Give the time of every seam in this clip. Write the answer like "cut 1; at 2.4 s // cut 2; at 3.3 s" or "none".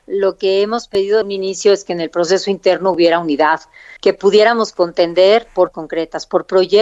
cut 1; at 1.2 s // cut 2; at 4.0 s // cut 3; at 5.7 s